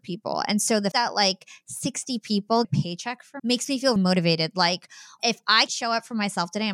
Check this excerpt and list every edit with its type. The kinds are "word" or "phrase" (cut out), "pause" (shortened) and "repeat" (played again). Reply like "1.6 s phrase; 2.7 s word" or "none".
0.9 s word; 2.6 s word; 3.4 s word; 4.0 s word; 5.2 s word; 5.7 s word